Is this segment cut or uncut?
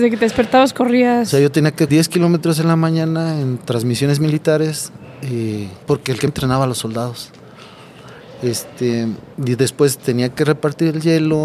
cut